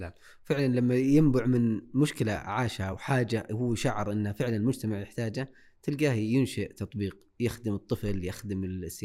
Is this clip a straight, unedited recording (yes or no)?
yes